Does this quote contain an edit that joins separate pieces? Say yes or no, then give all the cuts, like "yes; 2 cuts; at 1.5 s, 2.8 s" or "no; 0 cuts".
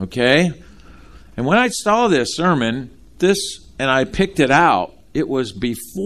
no; 0 cuts